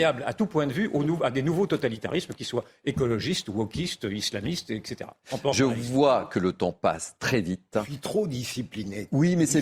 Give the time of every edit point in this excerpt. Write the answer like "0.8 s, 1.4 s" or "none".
none